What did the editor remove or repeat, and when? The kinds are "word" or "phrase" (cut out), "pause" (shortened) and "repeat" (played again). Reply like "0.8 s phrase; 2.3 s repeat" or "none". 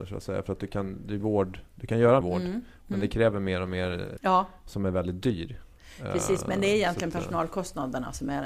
1.2 s word; 2.2 s word; 4.2 s word